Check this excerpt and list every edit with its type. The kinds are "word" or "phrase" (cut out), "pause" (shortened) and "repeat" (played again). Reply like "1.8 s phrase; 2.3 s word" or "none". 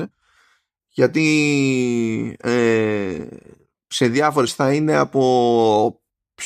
4.5 s word